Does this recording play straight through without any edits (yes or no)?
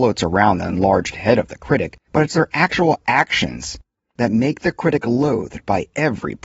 no